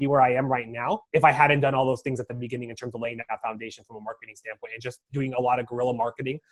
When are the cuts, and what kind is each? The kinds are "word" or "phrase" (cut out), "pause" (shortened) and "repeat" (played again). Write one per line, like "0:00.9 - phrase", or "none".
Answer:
0:01.0 - pause